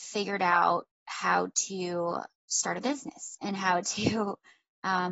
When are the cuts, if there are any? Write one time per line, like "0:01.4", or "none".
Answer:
0:02.4